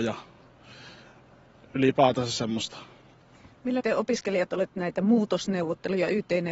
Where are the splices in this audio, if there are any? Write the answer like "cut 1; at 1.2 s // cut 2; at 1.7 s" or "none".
cut 1; at 3.8 s // cut 2; at 4.7 s